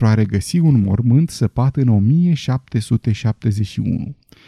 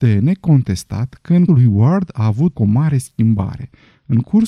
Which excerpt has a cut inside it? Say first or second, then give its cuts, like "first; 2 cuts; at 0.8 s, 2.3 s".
second; 2 cuts; at 1.5 s, 2.5 s